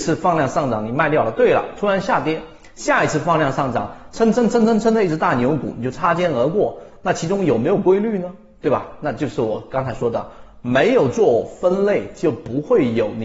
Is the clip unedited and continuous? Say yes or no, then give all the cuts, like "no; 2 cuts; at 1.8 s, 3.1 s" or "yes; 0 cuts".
yes; 0 cuts